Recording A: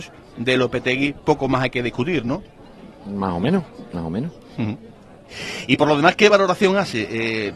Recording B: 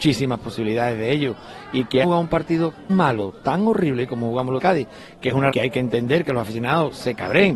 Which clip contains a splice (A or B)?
B